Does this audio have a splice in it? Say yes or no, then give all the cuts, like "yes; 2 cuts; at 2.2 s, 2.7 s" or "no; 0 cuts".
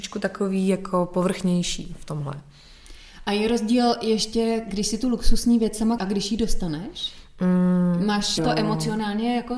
yes; 2 cuts; at 6.0 s, 8.4 s